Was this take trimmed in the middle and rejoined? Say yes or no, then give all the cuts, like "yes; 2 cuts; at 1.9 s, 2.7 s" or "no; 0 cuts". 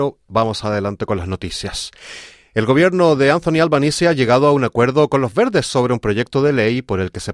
no; 0 cuts